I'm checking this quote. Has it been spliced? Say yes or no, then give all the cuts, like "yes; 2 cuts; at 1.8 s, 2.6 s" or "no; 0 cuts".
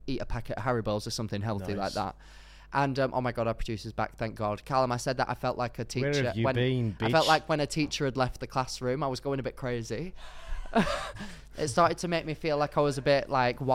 no; 0 cuts